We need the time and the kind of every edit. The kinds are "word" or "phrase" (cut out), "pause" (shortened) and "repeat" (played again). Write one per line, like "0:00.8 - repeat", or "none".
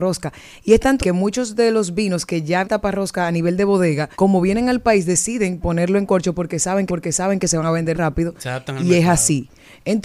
0:01.0 - word
0:02.6 - word
0:04.1 - pause
0:06.9 - repeat
0:07.9 - word